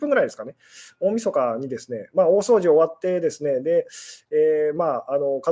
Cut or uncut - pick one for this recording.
uncut